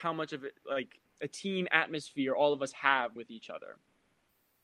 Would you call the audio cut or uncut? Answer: cut